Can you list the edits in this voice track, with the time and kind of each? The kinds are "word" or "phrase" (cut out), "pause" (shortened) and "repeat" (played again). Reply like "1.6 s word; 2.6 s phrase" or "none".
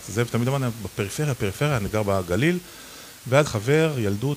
1.4 s word; 3.4 s word